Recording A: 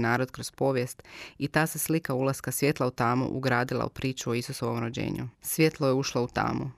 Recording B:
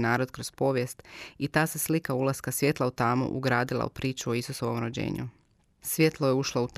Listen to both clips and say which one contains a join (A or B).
A